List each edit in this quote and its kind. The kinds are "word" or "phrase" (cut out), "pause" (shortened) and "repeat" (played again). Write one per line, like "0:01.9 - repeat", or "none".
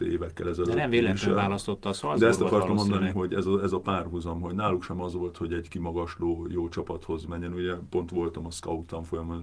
0:03.1 - word